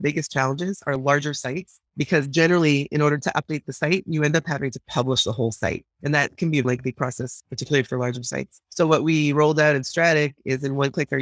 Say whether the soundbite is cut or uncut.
cut